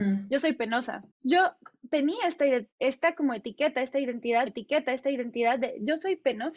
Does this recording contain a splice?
yes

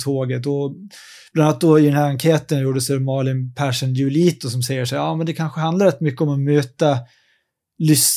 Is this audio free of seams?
yes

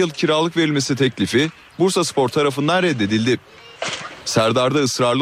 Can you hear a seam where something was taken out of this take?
no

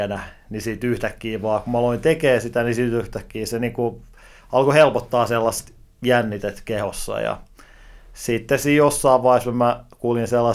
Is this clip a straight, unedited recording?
yes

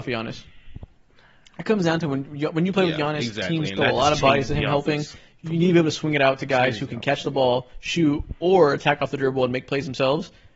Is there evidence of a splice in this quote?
no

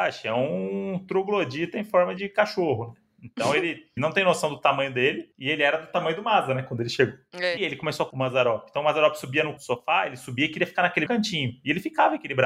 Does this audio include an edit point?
yes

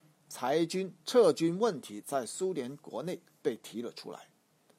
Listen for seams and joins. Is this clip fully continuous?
no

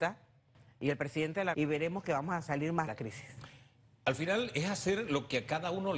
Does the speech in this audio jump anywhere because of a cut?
yes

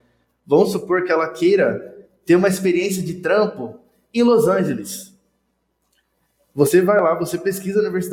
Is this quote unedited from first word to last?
yes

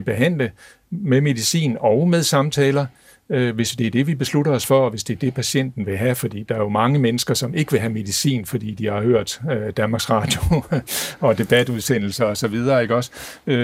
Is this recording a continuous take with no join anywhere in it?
yes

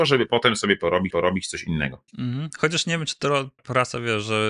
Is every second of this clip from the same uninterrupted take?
no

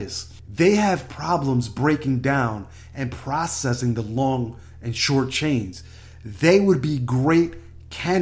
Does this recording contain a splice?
no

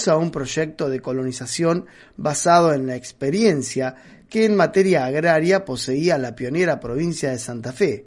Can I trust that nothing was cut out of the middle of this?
yes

